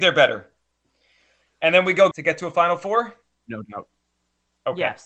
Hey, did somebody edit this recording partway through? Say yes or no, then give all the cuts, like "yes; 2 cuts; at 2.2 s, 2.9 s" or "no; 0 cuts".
yes; 1 cut; at 2.1 s